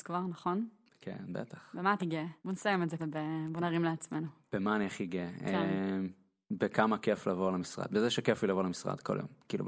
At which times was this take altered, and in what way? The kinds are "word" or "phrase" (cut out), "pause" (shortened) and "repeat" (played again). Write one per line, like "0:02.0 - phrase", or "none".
0:02.0 - word
0:02.4 - pause
0:03.0 - word